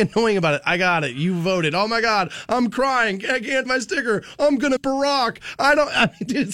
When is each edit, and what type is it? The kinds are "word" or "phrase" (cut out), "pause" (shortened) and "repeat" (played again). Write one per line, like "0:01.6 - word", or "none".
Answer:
0:03.7 - word
0:04.8 - word